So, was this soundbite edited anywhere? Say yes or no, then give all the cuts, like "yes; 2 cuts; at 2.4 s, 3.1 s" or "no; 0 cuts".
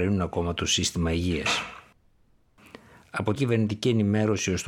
yes; 1 cut; at 3.4 s